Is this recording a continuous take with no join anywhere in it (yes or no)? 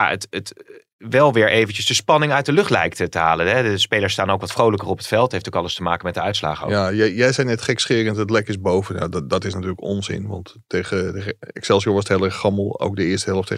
yes